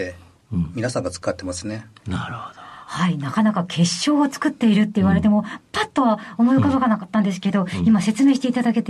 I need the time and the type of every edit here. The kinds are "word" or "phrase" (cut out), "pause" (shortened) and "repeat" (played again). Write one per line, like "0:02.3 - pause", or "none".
none